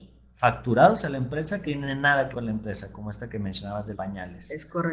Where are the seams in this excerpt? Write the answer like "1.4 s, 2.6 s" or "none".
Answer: 1.6 s, 2.3 s, 3.9 s

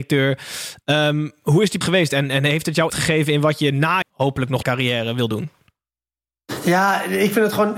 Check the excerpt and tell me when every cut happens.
1.8 s, 2.9 s, 4.0 s, 4.6 s

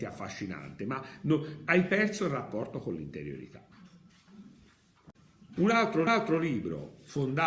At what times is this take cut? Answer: 6.1 s

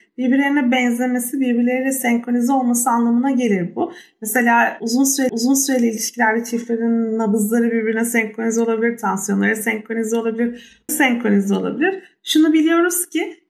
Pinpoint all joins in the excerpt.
5.3 s, 10.9 s

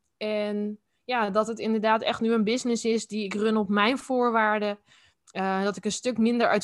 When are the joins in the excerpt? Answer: none

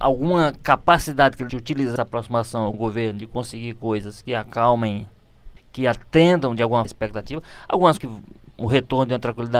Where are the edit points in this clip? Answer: 1.5 s, 2.0 s, 2.7 s, 5.6 s, 6.9 s, 8.0 s, 8.5 s

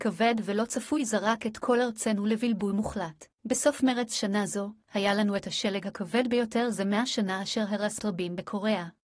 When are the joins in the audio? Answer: 3.3 s, 4.8 s, 8.0 s

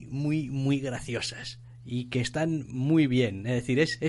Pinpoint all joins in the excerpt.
none

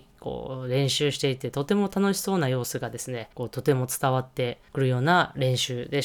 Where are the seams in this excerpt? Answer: 3.3 s, 4.7 s

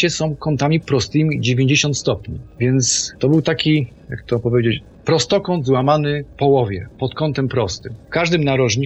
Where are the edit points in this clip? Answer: none

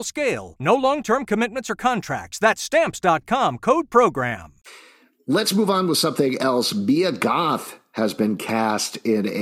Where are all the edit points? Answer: none

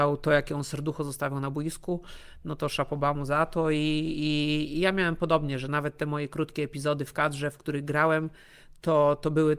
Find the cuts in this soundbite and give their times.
none

